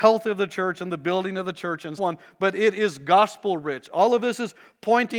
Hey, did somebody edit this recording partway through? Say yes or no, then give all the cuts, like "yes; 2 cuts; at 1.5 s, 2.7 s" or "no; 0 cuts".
yes; 1 cut; at 2.0 s